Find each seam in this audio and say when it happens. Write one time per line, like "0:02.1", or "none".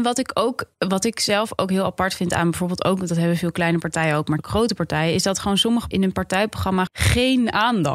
0:04.4
0:05.9
0:06.9